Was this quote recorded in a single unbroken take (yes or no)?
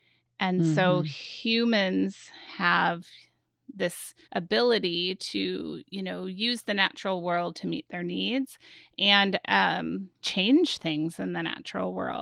no